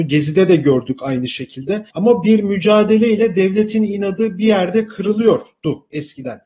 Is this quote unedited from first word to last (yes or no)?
no